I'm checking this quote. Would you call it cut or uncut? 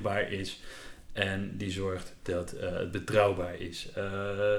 uncut